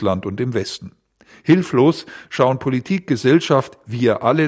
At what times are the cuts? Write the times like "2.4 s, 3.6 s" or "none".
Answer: none